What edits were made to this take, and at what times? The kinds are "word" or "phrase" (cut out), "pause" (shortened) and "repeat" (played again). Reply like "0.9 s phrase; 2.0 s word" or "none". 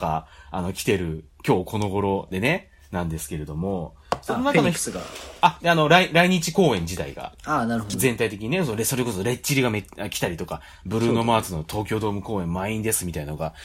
7.4 s pause